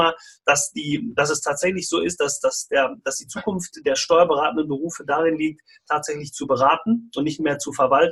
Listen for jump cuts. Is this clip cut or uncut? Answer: uncut